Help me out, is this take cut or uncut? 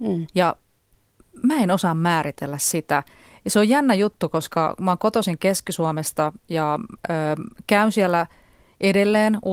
uncut